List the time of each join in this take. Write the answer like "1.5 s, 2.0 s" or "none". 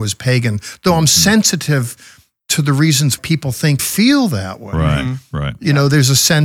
3.2 s, 3.8 s